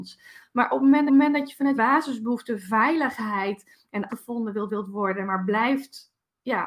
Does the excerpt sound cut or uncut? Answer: cut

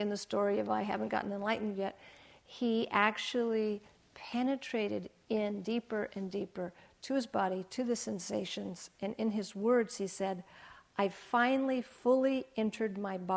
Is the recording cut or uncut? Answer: uncut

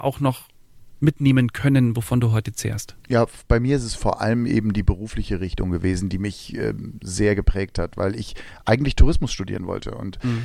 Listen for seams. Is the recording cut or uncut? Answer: cut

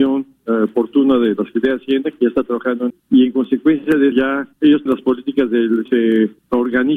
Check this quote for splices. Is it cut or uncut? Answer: cut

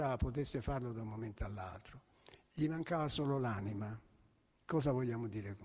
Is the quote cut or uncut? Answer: uncut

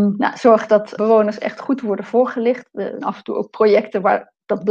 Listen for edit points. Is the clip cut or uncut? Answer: cut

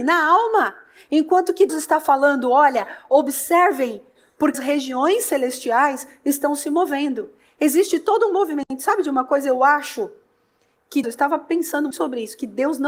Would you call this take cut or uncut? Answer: cut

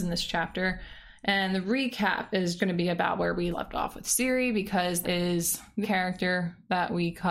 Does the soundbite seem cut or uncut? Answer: cut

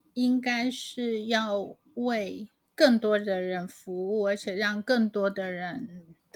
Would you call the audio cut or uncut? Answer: uncut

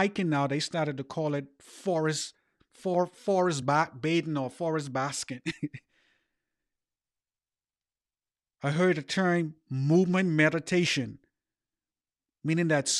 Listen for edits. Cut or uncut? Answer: uncut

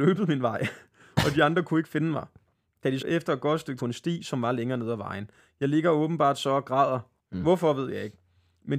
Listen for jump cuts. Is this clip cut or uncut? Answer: cut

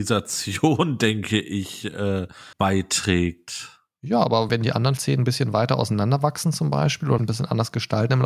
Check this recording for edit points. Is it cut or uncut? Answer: cut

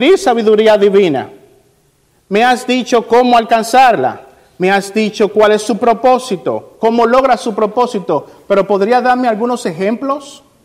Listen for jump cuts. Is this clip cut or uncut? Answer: uncut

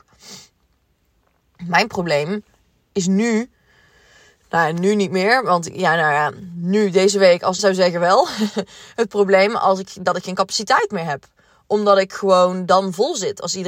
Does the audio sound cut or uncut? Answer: cut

